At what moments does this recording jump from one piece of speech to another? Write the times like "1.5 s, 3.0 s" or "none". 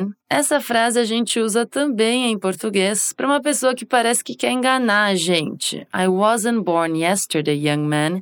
none